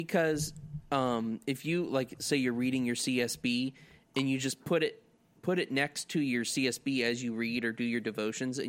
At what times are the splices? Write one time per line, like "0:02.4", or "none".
none